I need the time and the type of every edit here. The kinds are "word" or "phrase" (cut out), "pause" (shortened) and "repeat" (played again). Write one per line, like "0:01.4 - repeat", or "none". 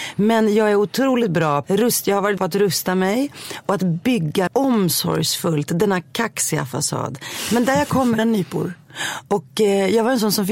0:01.6 - phrase
0:02.4 - word
0:04.5 - word
0:08.2 - phrase